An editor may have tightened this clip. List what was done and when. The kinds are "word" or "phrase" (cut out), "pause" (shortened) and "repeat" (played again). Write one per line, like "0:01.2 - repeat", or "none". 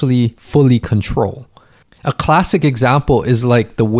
none